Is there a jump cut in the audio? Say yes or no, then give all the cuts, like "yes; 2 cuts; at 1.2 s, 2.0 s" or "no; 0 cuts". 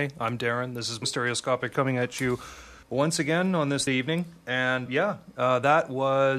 yes; 5 cuts; at 1.0 s, 1.7 s, 2.8 s, 3.9 s, 4.9 s